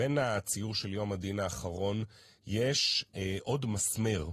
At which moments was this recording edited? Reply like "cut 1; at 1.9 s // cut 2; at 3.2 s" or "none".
none

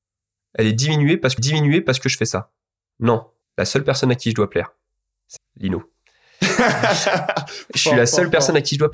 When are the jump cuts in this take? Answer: cut 1; at 1.4 s // cut 2; at 3.4 s // cut 3; at 5.4 s // cut 4; at 7.7 s

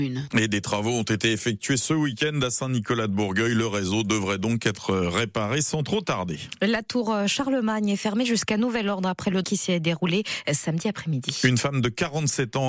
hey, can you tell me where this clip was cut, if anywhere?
cut 1; at 9.4 s

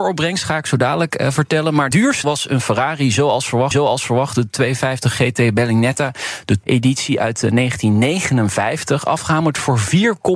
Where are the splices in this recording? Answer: cut 1; at 1.9 s // cut 2; at 2.2 s // cut 3; at 3.7 s // cut 4; at 6.6 s

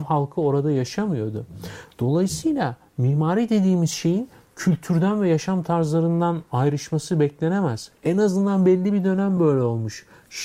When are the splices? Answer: none

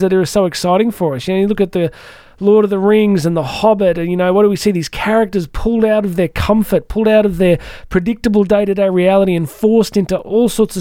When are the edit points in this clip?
none

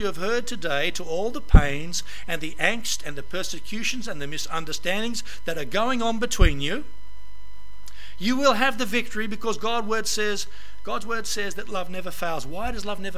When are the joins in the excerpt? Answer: none

